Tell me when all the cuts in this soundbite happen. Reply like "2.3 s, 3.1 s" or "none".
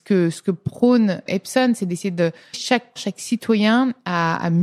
1.3 s, 2.5 s, 3.0 s